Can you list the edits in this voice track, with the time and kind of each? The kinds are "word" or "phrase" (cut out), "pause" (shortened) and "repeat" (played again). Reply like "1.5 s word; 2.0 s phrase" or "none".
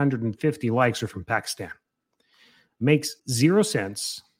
3.2 s pause